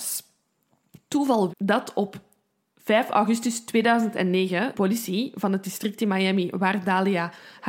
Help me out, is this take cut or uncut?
cut